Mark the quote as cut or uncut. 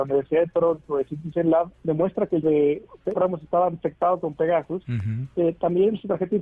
cut